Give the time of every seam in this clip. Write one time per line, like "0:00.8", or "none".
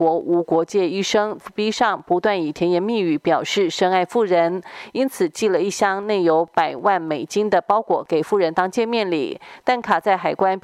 0:01.4